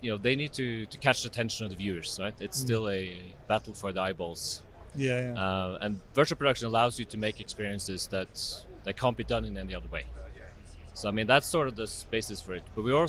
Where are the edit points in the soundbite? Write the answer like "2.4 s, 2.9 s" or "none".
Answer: none